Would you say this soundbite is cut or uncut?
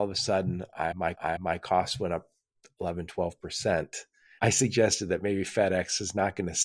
cut